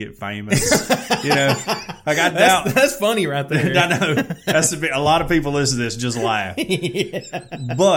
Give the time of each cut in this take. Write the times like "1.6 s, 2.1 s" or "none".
none

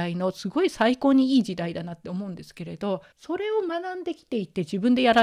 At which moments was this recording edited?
3.1 s

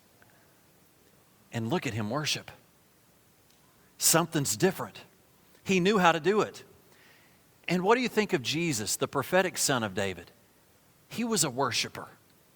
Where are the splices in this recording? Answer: none

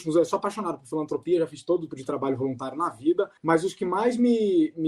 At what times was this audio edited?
1.9 s, 3.4 s

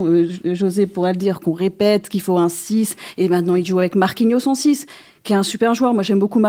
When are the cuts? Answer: none

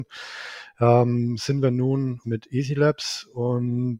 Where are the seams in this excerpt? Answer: 2.2 s

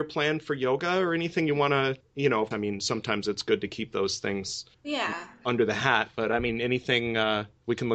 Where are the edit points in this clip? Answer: 2.0 s, 2.5 s, 4.7 s

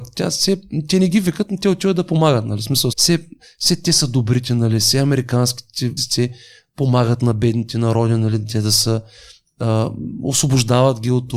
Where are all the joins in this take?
2.9 s, 6.0 s

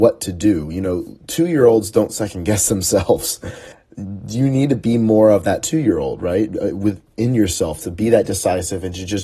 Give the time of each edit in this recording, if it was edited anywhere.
1.2 s, 3.7 s

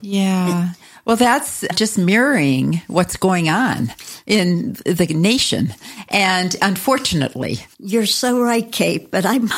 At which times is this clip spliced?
7.7 s

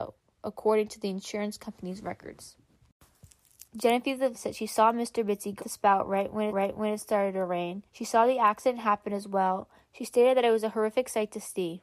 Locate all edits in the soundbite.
4.3 s, 5.6 s, 6.5 s, 7.9 s

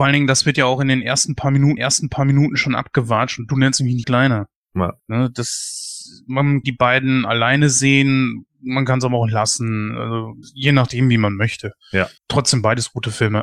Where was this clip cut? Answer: 1.8 s, 4.0 s, 5.0 s, 6.6 s, 10.4 s, 12.2 s

